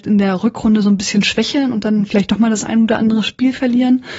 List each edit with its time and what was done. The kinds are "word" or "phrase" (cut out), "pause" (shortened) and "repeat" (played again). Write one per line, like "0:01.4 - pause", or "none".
none